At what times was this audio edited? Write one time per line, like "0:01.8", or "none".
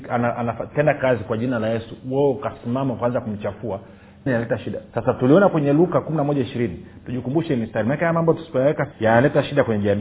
0:04.3
0:04.9
0:08.9